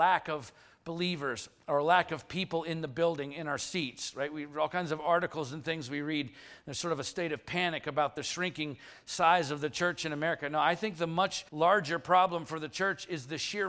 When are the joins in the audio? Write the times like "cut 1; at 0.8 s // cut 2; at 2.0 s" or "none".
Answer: cut 1; at 11.5 s